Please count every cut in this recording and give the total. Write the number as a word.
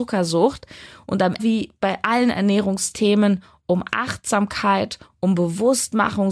one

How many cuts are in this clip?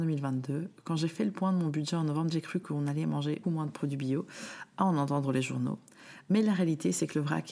two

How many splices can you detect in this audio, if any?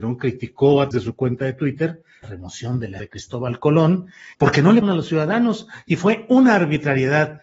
five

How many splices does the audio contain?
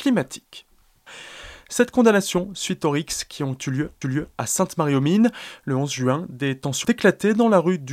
two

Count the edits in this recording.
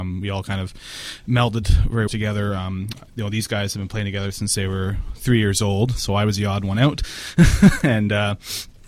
one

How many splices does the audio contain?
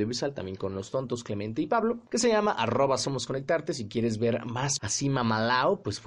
two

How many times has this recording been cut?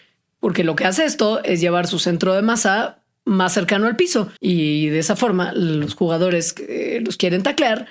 one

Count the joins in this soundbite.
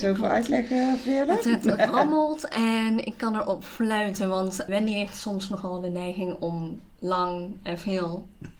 two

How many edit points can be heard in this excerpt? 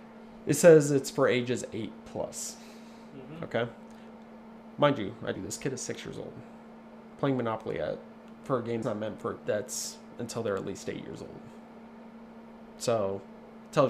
three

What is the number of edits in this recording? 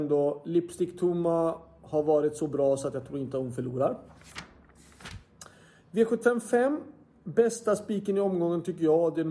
zero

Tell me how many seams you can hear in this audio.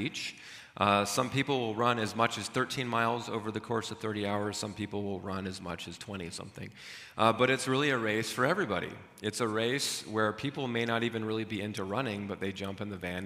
zero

